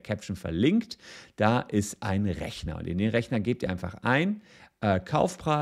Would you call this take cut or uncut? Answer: uncut